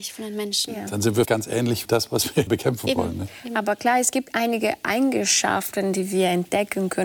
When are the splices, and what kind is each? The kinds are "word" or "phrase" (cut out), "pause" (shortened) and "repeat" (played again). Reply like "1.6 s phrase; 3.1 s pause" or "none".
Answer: 1.2 s word; 1.8 s word; 2.5 s word